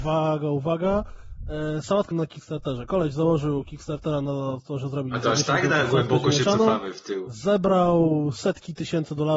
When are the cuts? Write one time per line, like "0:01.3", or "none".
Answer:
0:02.1